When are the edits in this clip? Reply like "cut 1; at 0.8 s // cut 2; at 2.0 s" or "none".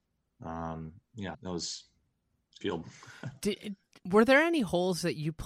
cut 1; at 1.3 s // cut 2; at 2.6 s